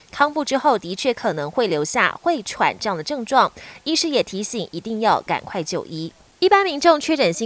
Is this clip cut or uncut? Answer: uncut